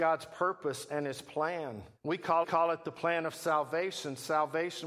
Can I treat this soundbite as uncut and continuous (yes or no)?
no